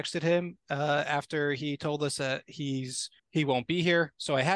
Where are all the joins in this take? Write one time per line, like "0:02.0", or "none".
0:03.2